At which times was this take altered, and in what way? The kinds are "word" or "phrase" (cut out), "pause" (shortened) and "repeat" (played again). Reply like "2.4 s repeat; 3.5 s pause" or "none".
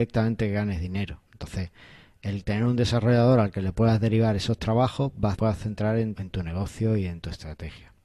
1.3 s pause; 5.3 s phrase; 6.2 s word